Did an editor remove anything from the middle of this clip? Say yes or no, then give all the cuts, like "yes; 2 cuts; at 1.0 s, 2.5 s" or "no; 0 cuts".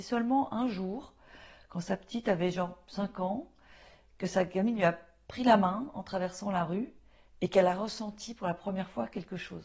no; 0 cuts